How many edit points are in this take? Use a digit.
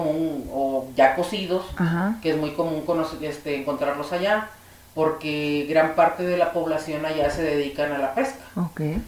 0